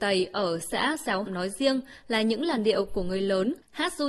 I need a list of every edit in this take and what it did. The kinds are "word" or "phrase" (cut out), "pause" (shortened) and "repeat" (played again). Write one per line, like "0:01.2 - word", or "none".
0:01.3 - phrase

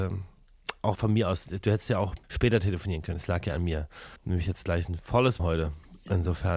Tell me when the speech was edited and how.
0:00.9 - word
0:02.2 - pause
0:04.2 - pause
0:05.4 - word

